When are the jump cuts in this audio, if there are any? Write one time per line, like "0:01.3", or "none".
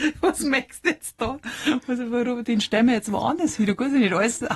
none